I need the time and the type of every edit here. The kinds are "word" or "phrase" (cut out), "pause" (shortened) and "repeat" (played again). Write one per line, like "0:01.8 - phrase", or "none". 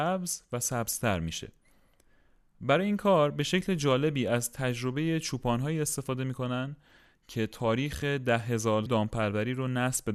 0:08.9 - word